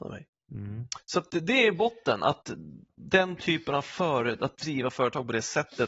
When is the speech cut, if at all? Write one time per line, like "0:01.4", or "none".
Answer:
none